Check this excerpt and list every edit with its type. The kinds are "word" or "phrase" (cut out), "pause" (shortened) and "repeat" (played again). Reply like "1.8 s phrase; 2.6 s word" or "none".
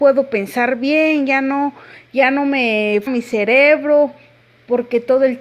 3.1 s word

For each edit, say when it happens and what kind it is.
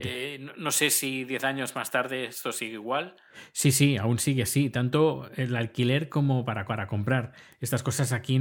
6.7 s repeat

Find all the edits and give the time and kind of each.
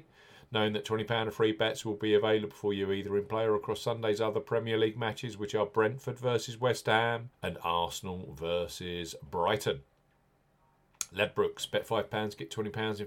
7.3 s pause

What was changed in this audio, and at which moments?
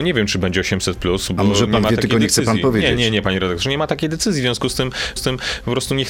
5.2 s repeat

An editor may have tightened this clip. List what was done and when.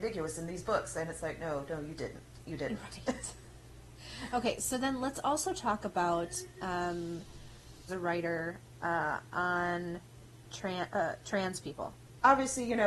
7.9 s phrase

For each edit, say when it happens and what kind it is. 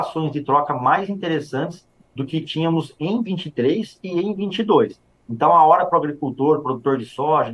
none

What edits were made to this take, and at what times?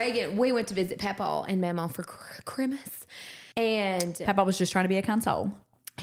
3.5 s pause

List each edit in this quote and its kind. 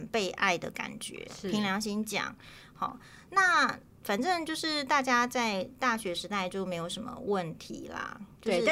none

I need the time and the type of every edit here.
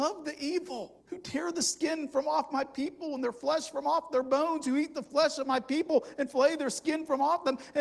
1.0 s pause

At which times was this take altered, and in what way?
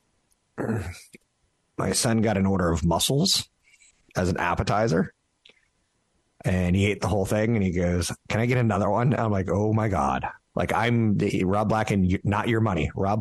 none

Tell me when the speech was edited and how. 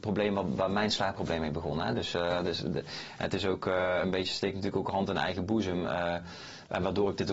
none

